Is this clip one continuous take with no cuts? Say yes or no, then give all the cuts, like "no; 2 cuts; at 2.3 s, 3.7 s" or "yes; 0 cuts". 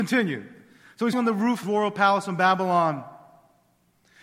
no; 2 cuts; at 1.1 s, 1.6 s